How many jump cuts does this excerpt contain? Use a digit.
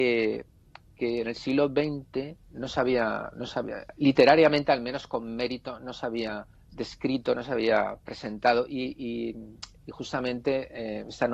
1